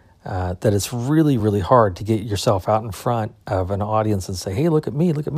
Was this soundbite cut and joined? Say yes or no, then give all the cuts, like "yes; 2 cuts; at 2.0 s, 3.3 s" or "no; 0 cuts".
no; 0 cuts